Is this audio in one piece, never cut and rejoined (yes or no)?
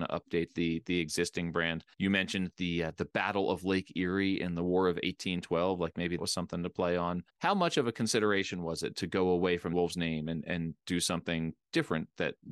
no